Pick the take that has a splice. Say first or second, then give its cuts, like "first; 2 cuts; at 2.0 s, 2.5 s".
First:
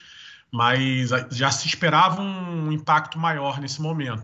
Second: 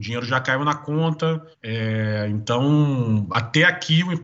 second; 1 cut; at 1.5 s